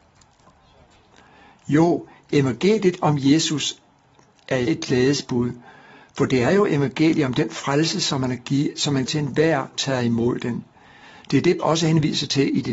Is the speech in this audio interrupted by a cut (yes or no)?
yes